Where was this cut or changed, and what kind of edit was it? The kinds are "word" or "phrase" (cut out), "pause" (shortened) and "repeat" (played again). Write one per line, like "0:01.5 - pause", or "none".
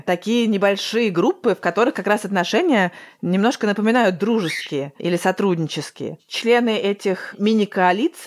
0:05.0 - pause